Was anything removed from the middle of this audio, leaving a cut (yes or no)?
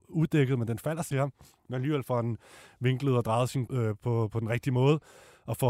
yes